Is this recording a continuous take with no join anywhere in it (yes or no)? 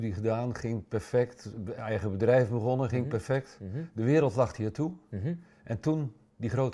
yes